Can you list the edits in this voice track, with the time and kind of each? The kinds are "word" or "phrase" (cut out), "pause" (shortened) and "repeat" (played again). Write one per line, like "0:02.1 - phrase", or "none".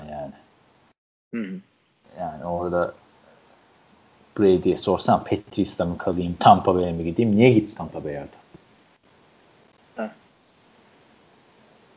0:07.8 - word